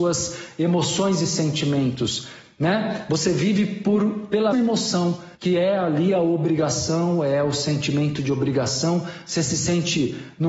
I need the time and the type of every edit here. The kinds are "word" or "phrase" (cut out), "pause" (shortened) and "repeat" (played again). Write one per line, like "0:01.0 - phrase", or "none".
0:04.5 - word
0:05.4 - pause